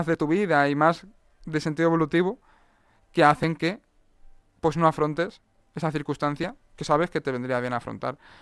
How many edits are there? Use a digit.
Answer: 0